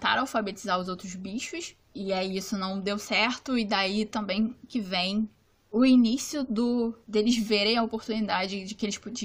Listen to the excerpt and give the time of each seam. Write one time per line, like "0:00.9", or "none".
none

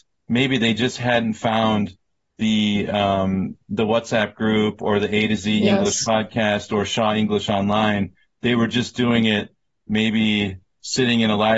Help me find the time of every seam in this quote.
none

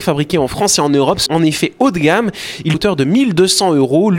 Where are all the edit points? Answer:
0:01.3
0:02.7

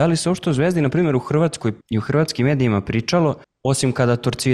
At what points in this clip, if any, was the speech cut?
0:01.8
0:03.4

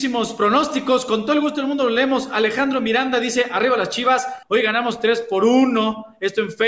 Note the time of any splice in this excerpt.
0:04.4

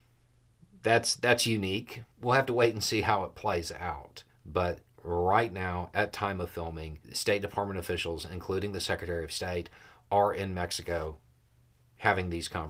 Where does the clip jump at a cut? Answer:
0:02.1
0:04.3
0:07.0

